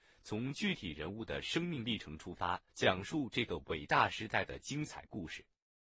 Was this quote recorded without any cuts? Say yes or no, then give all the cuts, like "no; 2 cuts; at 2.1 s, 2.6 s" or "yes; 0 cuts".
no; 1 cut; at 2.7 s